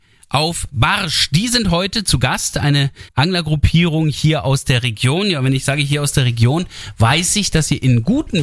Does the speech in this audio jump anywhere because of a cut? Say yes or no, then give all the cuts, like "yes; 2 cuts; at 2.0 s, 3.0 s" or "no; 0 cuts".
yes; 1 cut; at 3.1 s